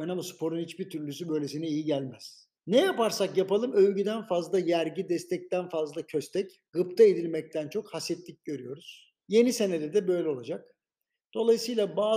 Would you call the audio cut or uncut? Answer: cut